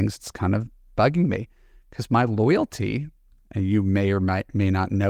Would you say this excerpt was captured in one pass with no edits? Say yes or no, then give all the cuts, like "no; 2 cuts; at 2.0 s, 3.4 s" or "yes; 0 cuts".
yes; 0 cuts